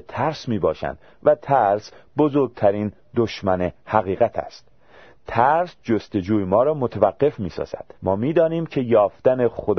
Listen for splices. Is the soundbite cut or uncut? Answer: cut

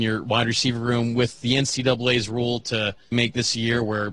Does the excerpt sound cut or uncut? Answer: cut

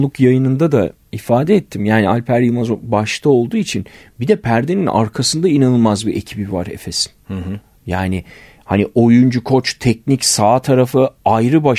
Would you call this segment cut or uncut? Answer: uncut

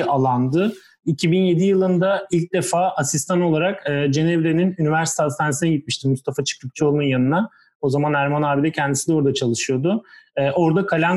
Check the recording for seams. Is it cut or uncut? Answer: uncut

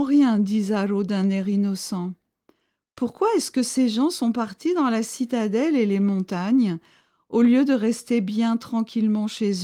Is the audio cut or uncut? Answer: uncut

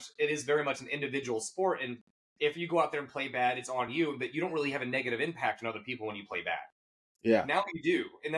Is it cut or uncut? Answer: uncut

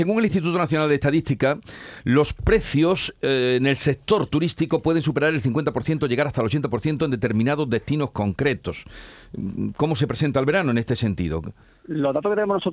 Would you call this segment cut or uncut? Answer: uncut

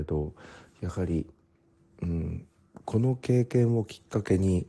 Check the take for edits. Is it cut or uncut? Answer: uncut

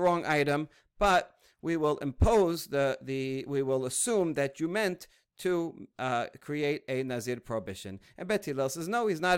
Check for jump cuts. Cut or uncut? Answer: uncut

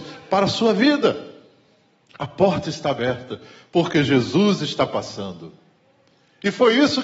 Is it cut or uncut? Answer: uncut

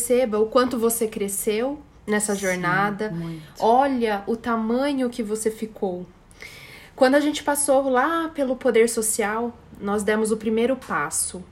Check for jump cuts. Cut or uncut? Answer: uncut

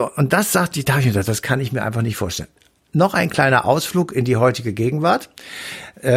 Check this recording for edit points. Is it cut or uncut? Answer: uncut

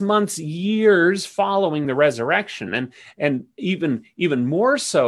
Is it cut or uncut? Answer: uncut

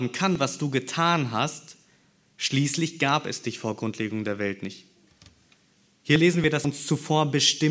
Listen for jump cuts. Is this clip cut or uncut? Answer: cut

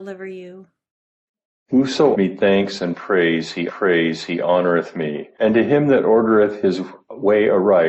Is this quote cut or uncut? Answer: cut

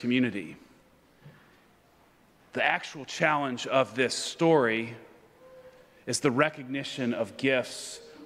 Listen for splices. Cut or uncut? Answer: uncut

